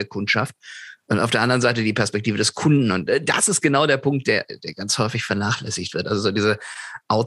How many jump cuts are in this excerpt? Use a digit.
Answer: 0